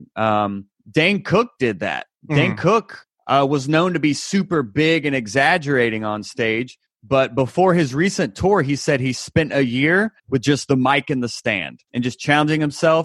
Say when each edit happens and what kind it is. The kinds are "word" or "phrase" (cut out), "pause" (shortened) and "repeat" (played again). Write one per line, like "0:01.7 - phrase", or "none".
0:02.1 - pause
0:10.2 - pause
0:11.8 - pause